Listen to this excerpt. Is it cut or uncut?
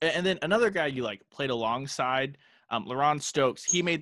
uncut